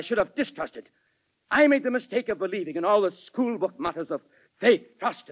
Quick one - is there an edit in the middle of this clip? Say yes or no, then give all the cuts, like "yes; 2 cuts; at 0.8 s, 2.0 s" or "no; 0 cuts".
no; 0 cuts